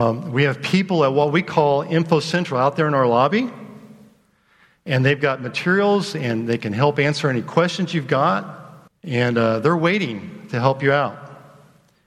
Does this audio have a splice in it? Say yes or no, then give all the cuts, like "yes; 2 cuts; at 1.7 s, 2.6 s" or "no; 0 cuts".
yes; 1 cut; at 8.9 s